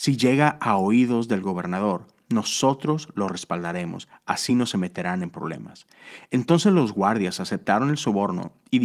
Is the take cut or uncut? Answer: uncut